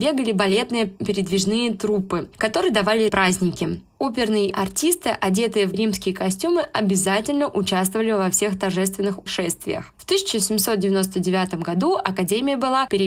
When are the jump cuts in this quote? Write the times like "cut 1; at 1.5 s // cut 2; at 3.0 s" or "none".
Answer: cut 1; at 3.1 s // cut 2; at 4.5 s // cut 3; at 5.7 s // cut 4; at 9.3 s